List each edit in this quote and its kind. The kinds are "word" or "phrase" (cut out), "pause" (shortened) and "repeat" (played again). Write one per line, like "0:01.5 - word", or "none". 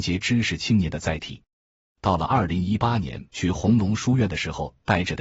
0:03.3 - pause